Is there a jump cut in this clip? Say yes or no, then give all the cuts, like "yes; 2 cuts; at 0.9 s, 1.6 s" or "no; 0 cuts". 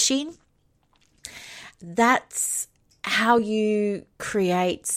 no; 0 cuts